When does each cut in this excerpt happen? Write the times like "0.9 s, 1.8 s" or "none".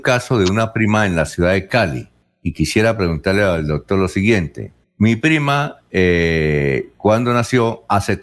2.2 s, 4.8 s

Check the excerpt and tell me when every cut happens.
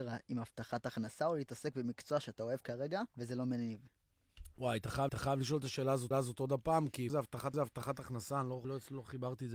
3.1 s, 5.1 s, 6.1 s, 7.1 s, 7.5 s, 8.6 s

